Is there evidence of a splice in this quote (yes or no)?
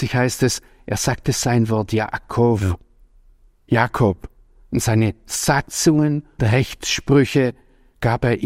yes